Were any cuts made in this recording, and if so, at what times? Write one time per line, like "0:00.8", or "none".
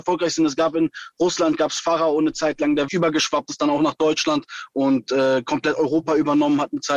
0:02.9